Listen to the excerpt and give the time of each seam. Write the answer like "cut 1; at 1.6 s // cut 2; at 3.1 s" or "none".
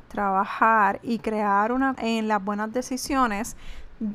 cut 1; at 2.0 s